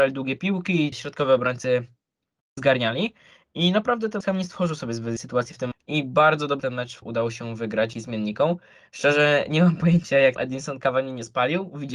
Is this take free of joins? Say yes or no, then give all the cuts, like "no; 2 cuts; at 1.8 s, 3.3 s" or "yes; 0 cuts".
no; 9 cuts; at 0.9 s, 2.6 s, 4.2 s, 5.2 s, 5.7 s, 6.6 s, 7.0 s, 7.9 s, 10.4 s